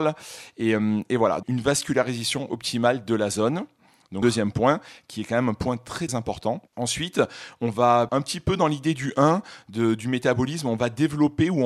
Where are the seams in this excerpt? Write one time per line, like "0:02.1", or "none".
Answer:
0:01.4
0:04.2
0:06.1
0:06.7
0:08.1